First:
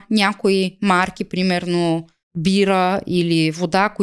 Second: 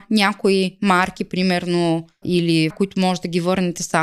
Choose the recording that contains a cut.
second; 2 cuts; at 2.2 s, 2.7 s

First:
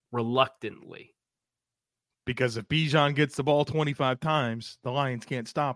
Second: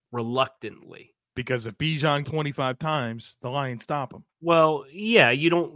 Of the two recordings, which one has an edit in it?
second; 3 cuts; at 1.2 s, 2.2 s, 3.8 s

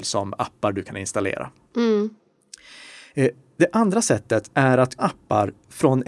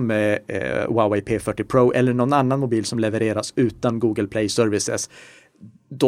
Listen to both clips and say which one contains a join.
first; 2 cuts; at 4.5 s, 5.0 s

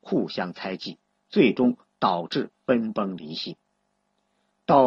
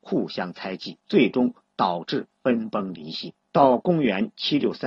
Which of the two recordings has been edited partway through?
second; 2 cuts; at 1.0 s, 3.4 s

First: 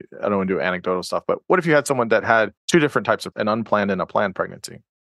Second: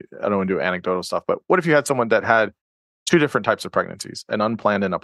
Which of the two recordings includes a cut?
first; 2 cuts; at 2.6 s, 3.3 s

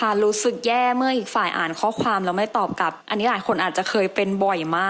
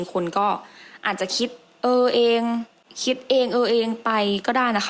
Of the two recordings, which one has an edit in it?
first; 1 cut; at 3.0 s

